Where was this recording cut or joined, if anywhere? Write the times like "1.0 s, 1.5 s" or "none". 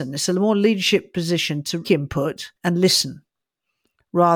1.8 s, 2.6 s